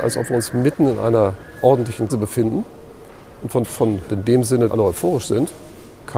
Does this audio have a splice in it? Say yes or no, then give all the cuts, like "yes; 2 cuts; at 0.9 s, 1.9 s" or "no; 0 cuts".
yes; 4 cuts; at 2.1 s, 3.6 s, 4.1 s, 4.7 s